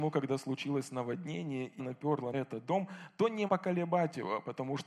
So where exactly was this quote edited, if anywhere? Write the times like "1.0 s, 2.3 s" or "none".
1.8 s, 2.3 s, 3.5 s